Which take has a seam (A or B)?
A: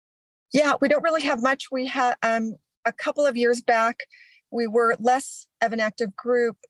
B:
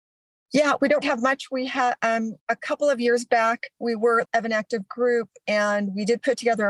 B